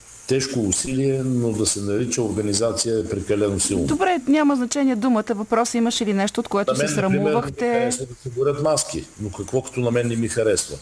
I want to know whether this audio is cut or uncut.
uncut